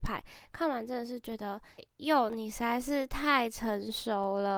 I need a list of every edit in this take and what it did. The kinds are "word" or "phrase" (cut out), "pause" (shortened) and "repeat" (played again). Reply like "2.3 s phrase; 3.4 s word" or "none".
1.8 s word